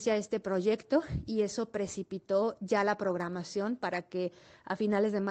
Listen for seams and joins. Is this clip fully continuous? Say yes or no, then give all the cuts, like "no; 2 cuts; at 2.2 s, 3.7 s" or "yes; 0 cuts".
yes; 0 cuts